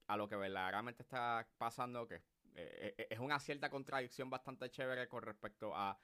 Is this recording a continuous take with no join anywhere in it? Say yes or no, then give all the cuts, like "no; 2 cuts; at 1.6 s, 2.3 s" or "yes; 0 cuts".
yes; 0 cuts